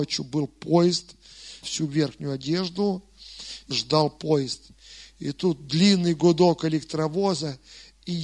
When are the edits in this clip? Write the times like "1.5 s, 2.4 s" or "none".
1.6 s, 3.7 s